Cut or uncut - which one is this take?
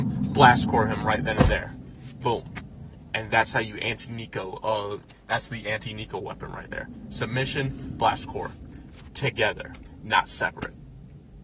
uncut